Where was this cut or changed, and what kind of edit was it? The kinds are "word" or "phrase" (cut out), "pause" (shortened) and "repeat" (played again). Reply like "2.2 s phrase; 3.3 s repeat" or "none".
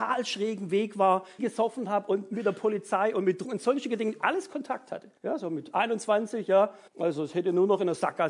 1.4 s word; 3.4 s word; 5.2 s pause; 6.9 s pause